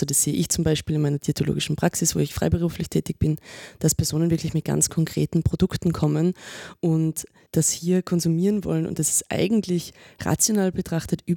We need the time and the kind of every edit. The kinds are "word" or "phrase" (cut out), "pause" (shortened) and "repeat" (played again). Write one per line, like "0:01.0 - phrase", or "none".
none